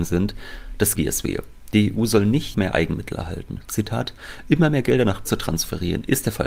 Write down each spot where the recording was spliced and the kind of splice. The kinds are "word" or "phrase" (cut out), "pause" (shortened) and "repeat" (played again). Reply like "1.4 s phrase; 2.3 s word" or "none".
0.9 s phrase; 2.5 s word; 5.2 s word